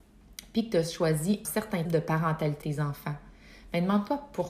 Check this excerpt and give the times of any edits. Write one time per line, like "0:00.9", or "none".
0:01.4
0:01.8
0:02.6